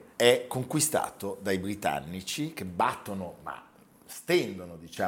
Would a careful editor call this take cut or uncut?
uncut